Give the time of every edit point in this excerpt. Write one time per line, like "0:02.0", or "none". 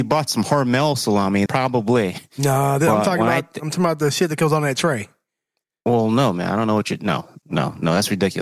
0:01.5
0:07.4